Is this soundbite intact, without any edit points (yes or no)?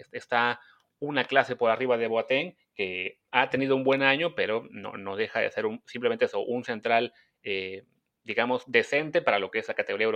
yes